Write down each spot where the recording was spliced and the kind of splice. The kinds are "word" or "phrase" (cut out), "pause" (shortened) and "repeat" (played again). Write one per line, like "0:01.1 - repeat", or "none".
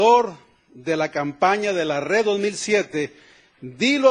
none